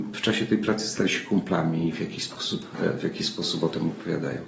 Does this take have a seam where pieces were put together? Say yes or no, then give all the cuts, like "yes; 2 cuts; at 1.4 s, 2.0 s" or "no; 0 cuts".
no; 0 cuts